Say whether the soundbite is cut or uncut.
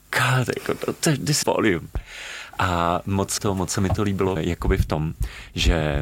cut